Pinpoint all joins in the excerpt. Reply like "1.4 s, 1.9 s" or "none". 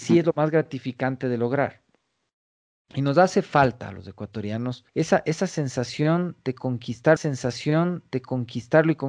4.9 s, 7.2 s